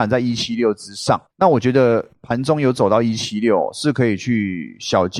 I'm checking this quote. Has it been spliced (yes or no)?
yes